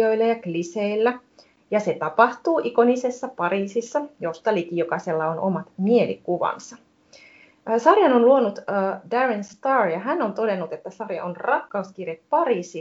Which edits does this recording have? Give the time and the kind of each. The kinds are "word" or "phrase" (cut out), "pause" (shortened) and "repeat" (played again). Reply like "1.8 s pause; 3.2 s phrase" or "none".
none

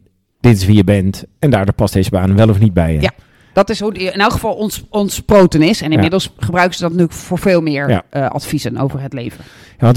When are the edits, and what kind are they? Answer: none

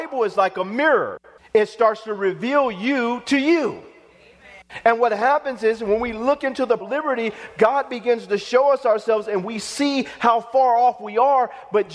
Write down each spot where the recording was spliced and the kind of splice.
1.4 s pause; 6.8 s phrase

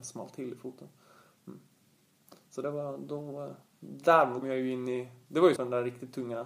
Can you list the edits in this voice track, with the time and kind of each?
4.4 s word; 5.6 s word

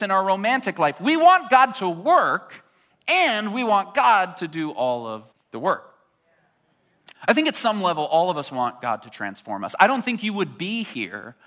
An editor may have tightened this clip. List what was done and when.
2.9 s phrase; 5.3 s pause; 7.1 s pause

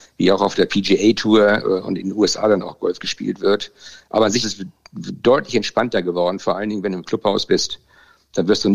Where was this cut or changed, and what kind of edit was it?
4.4 s word

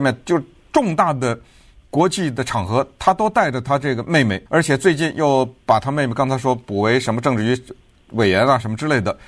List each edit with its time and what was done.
4.5 s pause

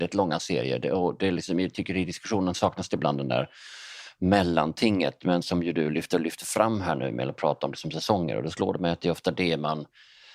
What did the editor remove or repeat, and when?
none

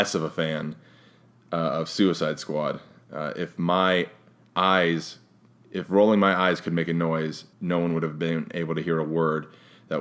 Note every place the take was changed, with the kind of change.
7.5 s pause

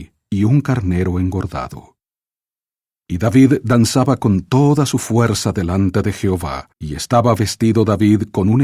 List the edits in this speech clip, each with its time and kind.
6.7 s pause

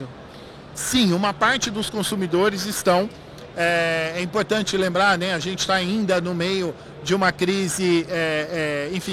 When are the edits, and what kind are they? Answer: none

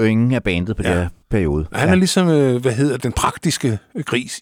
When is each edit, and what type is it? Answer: 1.2 s pause; 3.0 s word

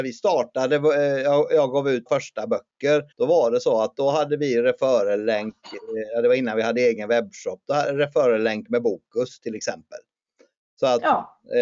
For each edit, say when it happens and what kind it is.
2.1 s word; 3.1 s pause

